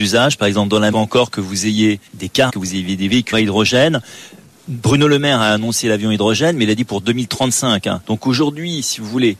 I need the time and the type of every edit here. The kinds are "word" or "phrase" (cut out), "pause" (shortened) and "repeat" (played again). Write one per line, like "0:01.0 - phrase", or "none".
0:00.9 - phrase
0:02.1 - pause
0:02.5 - phrase
0:03.3 - word
0:08.0 - pause